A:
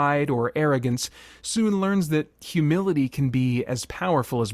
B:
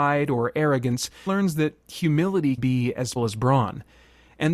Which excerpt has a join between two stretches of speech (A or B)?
B